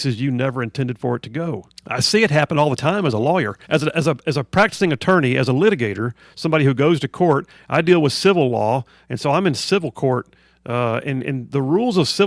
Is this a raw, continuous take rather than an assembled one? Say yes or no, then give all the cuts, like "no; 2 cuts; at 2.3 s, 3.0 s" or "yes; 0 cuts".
no; 2 cuts; at 1.8 s, 3.6 s